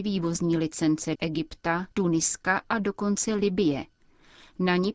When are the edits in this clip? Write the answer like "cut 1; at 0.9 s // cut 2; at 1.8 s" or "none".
cut 1; at 1.2 s // cut 2; at 1.9 s